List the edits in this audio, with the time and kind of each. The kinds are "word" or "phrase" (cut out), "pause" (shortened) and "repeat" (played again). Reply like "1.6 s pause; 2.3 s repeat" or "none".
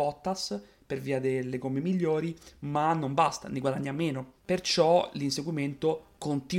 4.4 s pause